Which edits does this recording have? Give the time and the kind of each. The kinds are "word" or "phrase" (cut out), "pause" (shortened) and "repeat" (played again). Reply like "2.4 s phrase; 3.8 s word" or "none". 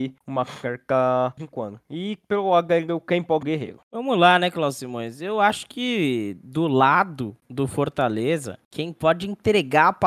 1.4 s phrase; 3.4 s phrase